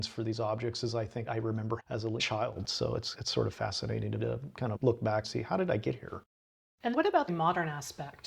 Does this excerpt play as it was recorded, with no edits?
no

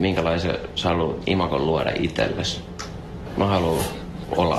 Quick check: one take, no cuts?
yes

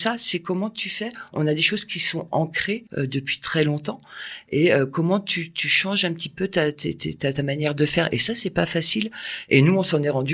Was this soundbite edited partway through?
yes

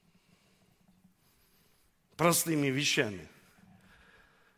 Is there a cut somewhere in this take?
no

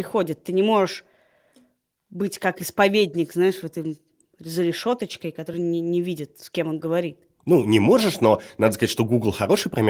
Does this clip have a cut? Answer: no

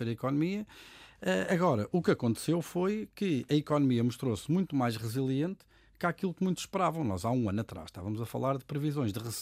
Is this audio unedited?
yes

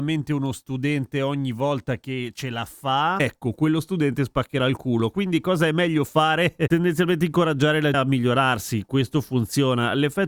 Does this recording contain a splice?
yes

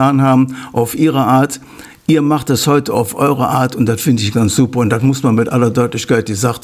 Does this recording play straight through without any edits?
no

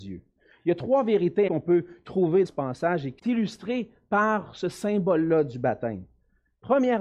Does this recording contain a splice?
yes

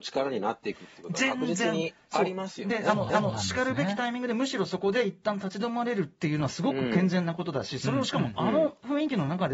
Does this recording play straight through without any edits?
no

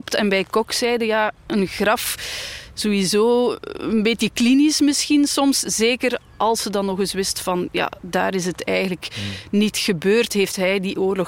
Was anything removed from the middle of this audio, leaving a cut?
yes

